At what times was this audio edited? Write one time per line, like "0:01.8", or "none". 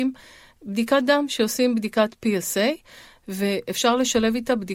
none